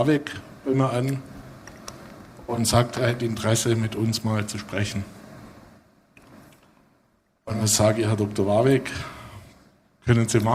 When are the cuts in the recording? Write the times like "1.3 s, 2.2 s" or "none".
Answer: none